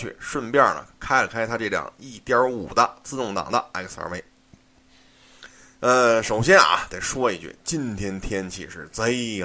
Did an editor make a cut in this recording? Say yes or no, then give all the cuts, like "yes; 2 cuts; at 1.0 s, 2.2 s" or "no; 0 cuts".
no; 0 cuts